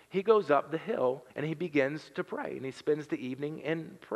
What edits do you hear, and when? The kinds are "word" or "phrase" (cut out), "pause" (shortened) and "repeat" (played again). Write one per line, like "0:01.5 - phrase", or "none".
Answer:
0:01.3 - pause